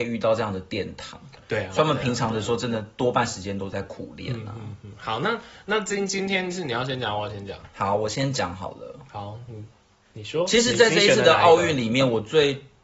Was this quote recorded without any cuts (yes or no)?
yes